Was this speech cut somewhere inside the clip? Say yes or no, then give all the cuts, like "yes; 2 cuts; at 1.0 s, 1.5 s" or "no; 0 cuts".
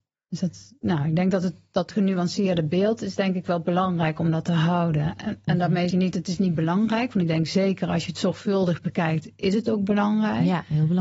yes; 1 cut; at 5.9 s